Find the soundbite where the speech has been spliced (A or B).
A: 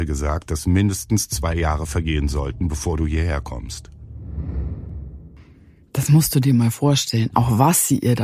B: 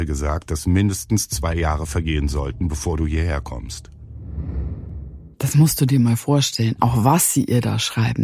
B